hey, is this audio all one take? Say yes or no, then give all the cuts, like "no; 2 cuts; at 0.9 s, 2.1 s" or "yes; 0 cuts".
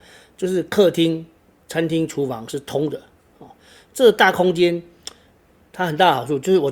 yes; 0 cuts